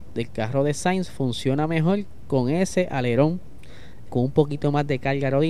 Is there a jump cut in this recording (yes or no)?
yes